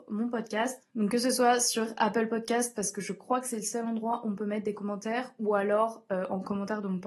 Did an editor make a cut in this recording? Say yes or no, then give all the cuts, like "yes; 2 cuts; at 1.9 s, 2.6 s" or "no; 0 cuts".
no; 0 cuts